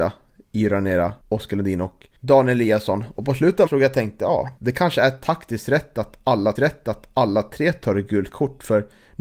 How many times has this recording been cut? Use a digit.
5